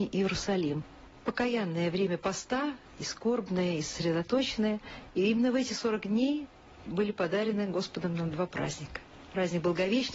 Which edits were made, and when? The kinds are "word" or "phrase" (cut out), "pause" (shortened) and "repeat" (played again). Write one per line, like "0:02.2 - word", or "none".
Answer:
none